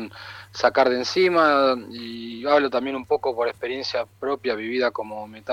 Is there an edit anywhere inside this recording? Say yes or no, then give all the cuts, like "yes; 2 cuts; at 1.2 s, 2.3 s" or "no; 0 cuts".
no; 0 cuts